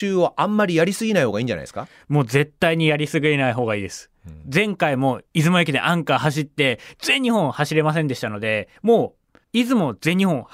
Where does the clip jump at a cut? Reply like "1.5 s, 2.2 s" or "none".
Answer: 5.3 s, 8.8 s, 9.4 s